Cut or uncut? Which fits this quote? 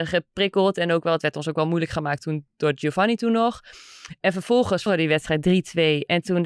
cut